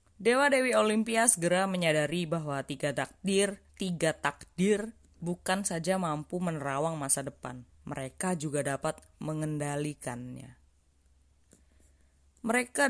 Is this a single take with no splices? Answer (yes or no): no